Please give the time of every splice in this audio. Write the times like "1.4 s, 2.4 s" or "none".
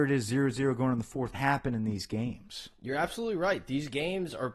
1.3 s